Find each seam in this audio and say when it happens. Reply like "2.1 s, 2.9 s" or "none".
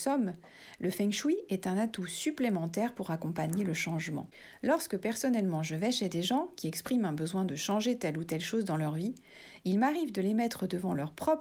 none